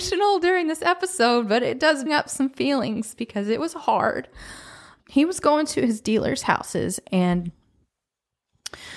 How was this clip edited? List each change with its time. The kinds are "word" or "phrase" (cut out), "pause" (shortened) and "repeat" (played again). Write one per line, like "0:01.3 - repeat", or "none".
0:02.1 - word
0:05.0 - word